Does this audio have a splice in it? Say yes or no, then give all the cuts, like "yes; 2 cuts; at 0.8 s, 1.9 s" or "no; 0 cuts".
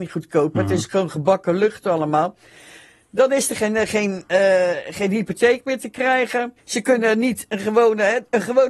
yes; 1 cut; at 6.6 s